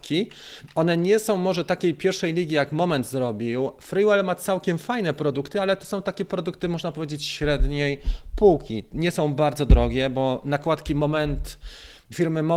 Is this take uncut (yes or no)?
yes